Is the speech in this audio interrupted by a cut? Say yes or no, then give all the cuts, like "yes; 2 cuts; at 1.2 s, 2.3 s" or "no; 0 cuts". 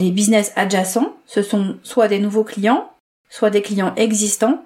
no; 0 cuts